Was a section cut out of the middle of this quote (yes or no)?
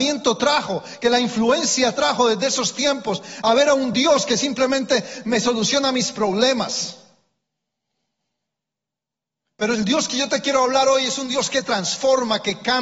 no